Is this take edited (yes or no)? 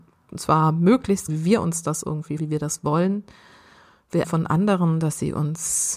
yes